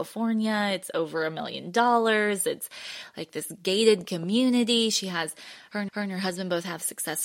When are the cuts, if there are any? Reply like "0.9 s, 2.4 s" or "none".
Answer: 5.9 s